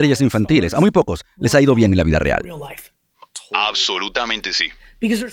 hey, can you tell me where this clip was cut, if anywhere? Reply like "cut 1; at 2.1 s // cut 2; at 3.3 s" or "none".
none